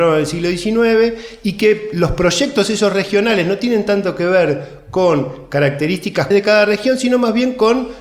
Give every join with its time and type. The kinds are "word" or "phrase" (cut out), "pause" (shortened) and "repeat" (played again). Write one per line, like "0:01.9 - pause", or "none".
0:06.3 - word